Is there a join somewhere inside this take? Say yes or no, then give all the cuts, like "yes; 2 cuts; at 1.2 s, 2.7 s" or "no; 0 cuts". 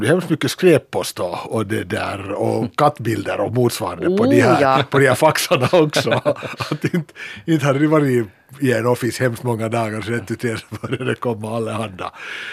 no; 0 cuts